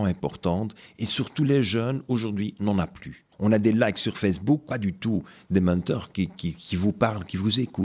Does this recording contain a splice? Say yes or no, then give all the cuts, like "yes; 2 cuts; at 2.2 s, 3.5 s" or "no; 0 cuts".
yes; 2 cuts; at 3.3 s, 4.7 s